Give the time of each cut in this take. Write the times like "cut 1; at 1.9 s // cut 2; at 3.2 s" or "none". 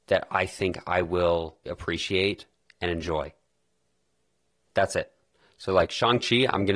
cut 1; at 1.7 s